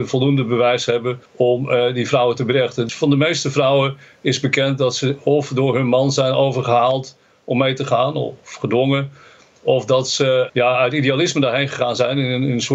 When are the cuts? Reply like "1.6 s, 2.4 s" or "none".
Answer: 1.3 s, 10.5 s